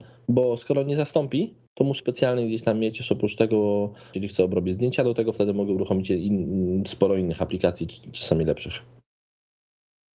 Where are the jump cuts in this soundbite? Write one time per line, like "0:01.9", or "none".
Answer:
0:01.7
0:02.0
0:04.1